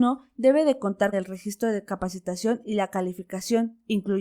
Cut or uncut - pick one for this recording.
cut